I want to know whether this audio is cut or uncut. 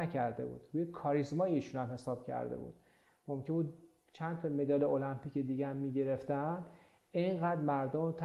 uncut